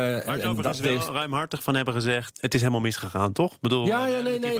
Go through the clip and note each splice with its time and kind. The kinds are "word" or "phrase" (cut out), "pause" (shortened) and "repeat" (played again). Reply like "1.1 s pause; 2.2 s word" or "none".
2.3 s word